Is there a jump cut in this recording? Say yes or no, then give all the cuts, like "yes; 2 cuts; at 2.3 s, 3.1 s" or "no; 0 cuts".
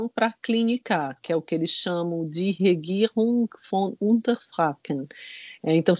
no; 0 cuts